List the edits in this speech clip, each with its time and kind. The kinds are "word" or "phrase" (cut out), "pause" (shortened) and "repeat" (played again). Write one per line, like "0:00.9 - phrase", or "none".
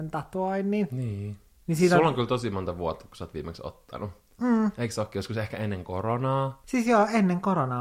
none